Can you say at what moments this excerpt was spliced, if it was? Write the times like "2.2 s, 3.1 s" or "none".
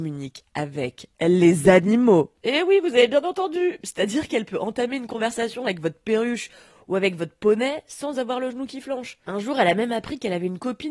none